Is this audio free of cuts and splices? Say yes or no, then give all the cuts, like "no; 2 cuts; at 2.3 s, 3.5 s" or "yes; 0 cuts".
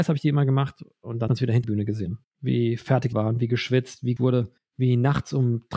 no; 6 cuts; at 1.3 s, 1.6 s, 2.2 s, 3.1 s, 4.2 s, 4.6 s